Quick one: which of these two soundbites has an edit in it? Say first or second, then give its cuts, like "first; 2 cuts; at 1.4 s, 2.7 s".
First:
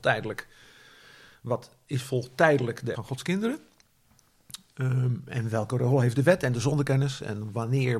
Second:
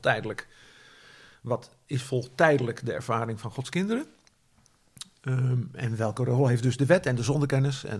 first; 2 cuts; at 2.9 s, 6.1 s